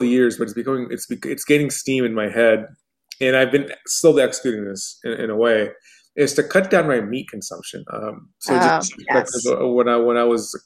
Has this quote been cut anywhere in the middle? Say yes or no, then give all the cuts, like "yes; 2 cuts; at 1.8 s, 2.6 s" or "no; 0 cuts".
no; 0 cuts